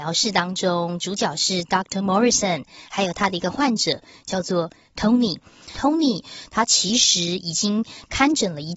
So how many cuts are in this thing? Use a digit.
0